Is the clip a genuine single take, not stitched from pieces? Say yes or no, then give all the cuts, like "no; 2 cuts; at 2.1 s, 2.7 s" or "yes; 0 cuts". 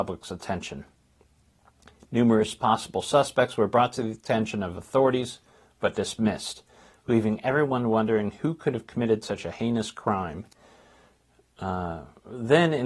yes; 0 cuts